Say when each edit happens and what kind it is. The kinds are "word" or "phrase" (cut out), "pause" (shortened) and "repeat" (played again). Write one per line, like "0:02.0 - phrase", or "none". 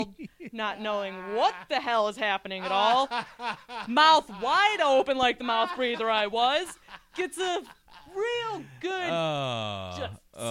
none